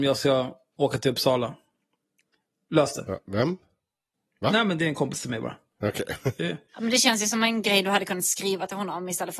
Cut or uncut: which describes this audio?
uncut